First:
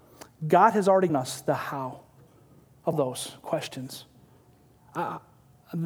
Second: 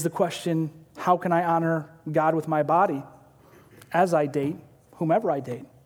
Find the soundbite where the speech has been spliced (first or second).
first